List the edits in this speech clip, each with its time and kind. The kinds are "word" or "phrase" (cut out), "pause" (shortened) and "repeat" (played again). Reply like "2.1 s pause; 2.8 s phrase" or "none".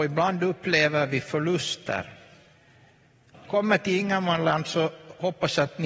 3.5 s word